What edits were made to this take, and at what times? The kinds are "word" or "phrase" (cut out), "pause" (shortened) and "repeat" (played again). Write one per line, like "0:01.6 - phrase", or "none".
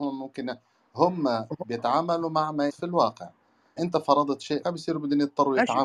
0:02.7 - word
0:03.8 - word
0:04.6 - word